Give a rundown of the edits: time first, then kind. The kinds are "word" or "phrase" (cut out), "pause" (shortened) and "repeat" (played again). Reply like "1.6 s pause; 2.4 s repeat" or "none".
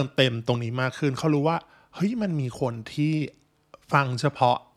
none